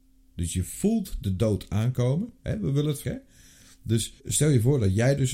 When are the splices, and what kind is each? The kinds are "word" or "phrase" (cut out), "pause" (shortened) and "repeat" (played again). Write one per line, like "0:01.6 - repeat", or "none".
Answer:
0:03.0 - word
0:04.2 - pause